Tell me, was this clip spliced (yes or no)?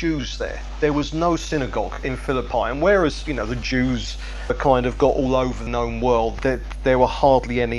yes